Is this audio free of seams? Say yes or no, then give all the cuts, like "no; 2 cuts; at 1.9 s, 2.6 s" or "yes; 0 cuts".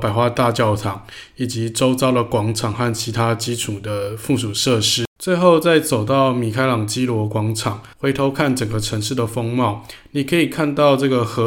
no; 2 cuts; at 5.2 s, 7.9 s